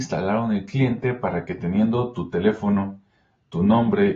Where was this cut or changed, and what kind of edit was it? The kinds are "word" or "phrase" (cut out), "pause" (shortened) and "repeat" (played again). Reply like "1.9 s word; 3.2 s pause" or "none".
none